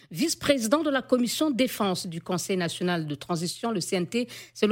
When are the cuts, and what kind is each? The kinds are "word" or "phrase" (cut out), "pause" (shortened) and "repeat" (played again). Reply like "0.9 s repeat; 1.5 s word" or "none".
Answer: none